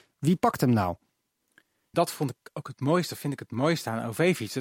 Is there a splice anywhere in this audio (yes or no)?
yes